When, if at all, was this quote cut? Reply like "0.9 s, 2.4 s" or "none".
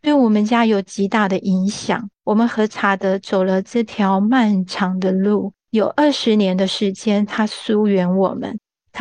2.1 s, 5.6 s